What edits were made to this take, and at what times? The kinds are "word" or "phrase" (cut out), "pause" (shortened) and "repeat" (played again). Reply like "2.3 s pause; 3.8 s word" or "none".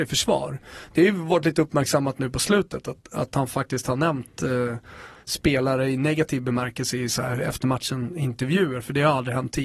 none